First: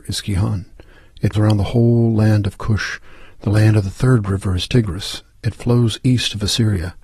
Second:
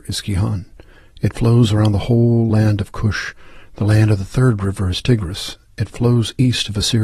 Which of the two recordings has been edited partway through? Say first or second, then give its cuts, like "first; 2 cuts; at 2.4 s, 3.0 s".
first; 1 cut; at 1.3 s